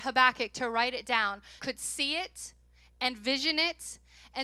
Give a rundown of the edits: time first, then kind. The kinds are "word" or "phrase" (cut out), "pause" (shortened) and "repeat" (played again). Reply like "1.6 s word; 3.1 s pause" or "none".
1.6 s phrase